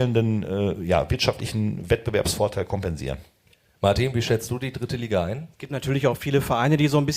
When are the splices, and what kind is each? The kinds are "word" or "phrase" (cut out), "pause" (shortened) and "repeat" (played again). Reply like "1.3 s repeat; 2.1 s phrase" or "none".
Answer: 3.5 s pause; 5.5 s pause